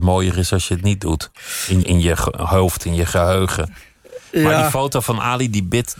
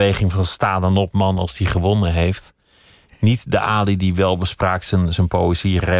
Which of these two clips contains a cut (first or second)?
first